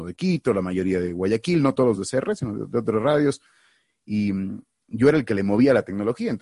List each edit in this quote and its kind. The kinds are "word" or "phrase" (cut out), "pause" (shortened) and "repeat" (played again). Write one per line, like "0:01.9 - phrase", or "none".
none